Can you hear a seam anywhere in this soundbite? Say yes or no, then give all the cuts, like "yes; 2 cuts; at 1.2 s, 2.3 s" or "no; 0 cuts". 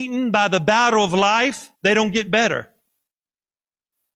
yes; 1 cut; at 1.7 s